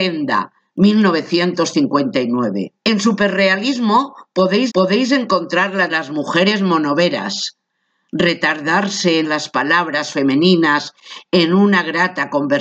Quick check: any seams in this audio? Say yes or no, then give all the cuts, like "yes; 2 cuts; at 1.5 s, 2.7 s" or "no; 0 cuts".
yes; 4 cuts; at 2.8 s, 4.7 s, 5.9 s, 9.2 s